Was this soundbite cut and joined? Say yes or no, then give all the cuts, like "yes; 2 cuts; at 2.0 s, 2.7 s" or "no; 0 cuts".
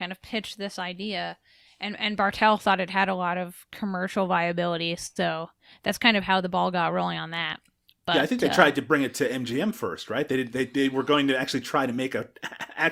no; 0 cuts